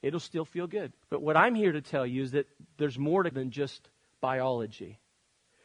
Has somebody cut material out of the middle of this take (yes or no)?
yes